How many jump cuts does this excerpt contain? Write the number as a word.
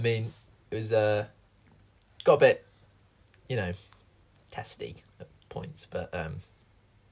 zero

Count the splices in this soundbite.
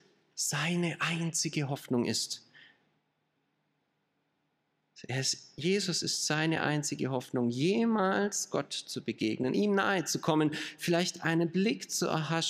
zero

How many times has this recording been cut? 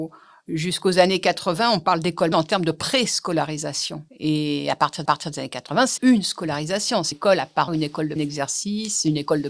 seven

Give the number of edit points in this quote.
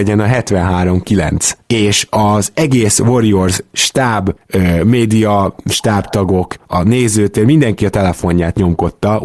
zero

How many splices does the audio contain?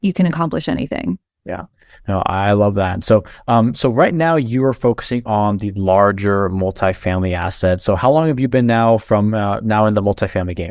zero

